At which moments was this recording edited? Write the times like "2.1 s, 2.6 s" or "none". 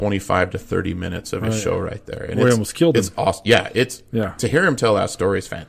none

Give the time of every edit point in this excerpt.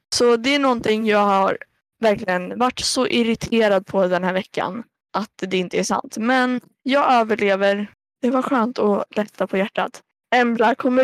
none

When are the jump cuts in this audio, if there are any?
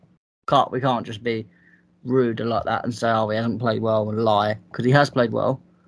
none

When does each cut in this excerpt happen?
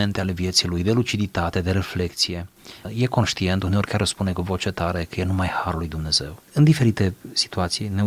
6.5 s

